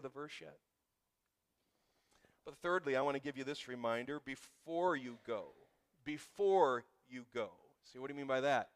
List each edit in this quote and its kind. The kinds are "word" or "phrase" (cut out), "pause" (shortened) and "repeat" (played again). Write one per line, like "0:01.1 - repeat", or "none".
none